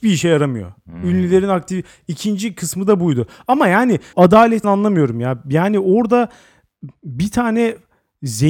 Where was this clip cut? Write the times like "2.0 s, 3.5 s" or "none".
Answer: 4.1 s, 4.6 s